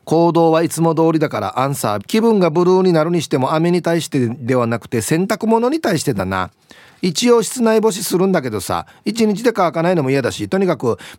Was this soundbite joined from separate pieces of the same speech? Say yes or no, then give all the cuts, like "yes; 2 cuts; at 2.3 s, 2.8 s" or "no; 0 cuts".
yes; 1 cut; at 2.0 s